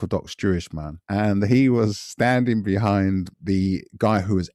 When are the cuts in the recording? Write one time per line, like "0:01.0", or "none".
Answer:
0:01.0
0:03.3